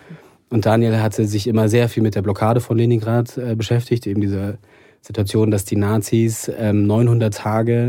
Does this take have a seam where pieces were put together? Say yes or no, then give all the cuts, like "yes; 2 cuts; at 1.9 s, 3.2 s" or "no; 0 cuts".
no; 0 cuts